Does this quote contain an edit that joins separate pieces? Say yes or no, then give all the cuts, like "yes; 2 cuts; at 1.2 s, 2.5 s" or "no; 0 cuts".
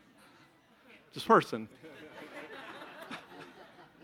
yes; 1 cut; at 1.2 s